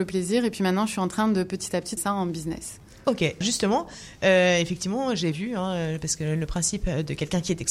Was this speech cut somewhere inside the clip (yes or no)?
yes